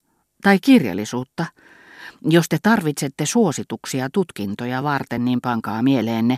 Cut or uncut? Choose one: uncut